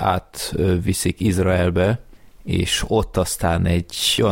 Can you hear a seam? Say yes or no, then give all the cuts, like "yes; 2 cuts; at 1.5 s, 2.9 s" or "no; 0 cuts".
no; 0 cuts